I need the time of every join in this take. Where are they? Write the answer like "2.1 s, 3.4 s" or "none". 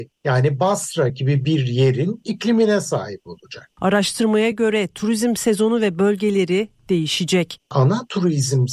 none